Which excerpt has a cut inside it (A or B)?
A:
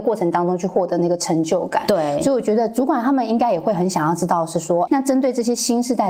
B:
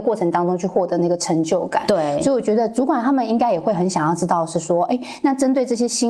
A